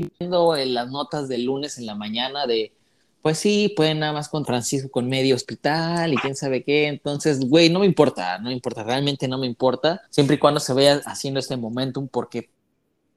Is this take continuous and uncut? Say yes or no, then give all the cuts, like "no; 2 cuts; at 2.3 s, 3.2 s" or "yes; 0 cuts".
no; 2 cuts; at 4.4 s, 10.1 s